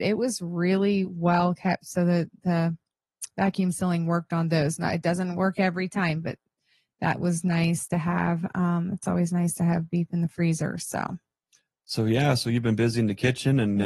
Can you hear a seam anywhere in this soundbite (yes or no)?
no